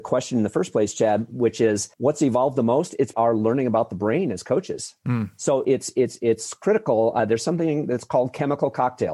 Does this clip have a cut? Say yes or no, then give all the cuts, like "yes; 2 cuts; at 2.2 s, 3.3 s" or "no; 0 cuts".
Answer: yes; 3 cuts; at 1.9 s, 3.1 s, 5.6 s